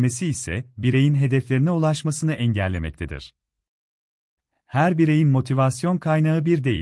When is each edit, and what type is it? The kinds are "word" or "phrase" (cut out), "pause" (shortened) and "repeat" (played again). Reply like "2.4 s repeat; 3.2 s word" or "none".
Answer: none